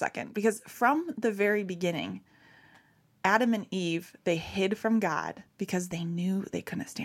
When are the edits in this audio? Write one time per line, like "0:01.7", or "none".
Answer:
0:05.5